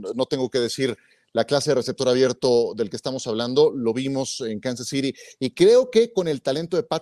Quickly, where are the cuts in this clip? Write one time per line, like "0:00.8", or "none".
none